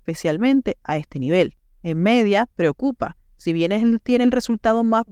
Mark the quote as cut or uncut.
uncut